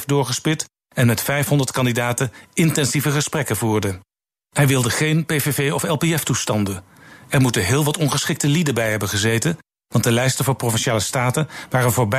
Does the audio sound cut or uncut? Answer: uncut